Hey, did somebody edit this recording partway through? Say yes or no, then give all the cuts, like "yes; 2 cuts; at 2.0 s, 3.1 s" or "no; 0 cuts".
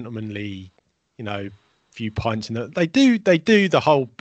no; 0 cuts